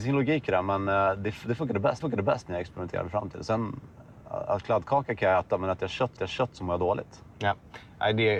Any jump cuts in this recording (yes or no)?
yes